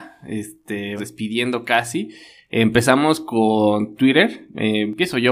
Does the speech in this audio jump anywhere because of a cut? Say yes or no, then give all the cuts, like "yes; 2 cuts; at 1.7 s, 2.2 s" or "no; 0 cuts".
yes; 2 cuts; at 1.0 s, 4.0 s